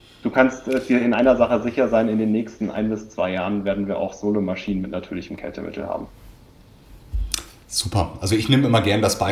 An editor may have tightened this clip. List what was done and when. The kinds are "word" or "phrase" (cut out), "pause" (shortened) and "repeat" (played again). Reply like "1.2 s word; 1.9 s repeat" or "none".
none